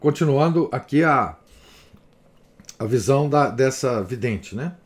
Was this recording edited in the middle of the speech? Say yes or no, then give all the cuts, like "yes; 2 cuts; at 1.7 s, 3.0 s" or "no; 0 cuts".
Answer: no; 0 cuts